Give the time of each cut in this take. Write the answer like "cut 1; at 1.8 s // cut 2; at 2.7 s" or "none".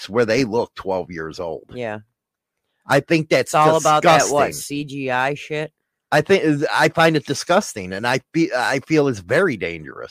none